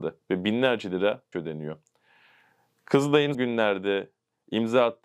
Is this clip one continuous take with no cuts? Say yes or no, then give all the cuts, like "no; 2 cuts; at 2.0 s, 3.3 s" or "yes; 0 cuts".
no; 2 cuts; at 1.3 s, 3.3 s